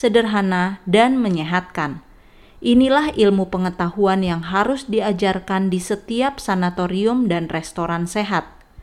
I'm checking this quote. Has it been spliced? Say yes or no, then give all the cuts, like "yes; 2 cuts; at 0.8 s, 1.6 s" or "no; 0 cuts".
no; 0 cuts